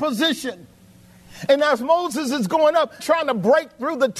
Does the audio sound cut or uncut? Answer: cut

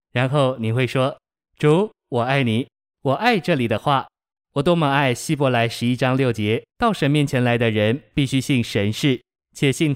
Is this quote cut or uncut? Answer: cut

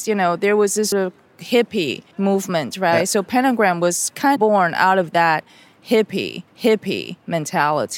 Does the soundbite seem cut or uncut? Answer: cut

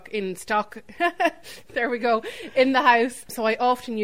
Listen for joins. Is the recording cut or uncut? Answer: uncut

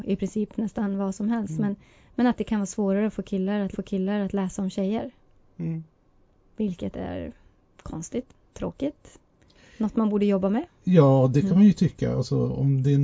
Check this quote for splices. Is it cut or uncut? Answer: cut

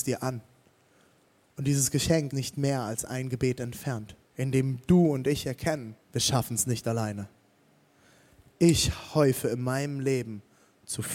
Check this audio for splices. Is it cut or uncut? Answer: cut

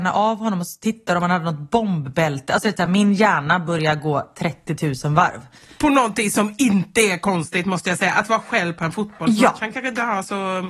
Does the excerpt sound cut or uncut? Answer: uncut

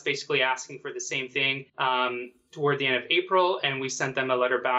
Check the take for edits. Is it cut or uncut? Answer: cut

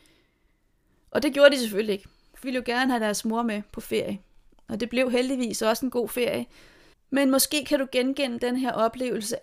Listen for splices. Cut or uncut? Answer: cut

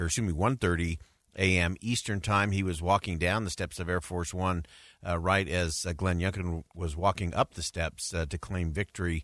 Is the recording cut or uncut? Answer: uncut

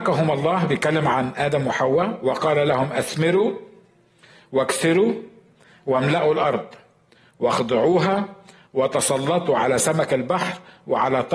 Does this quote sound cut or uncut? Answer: uncut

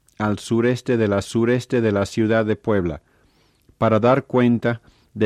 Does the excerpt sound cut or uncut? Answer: cut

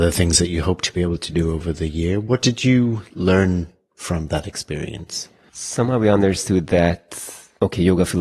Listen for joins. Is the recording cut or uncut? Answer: uncut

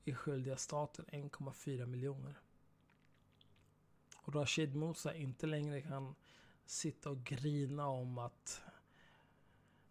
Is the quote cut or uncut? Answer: uncut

